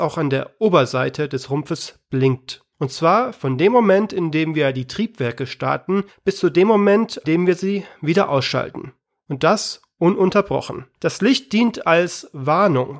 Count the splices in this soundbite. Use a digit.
4